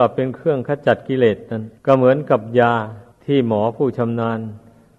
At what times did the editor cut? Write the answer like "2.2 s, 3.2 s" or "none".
1.8 s, 3.1 s